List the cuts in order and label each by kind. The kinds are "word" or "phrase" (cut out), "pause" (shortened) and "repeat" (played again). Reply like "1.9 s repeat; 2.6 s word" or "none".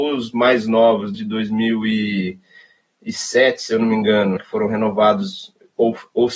1.1 s word; 4.4 s word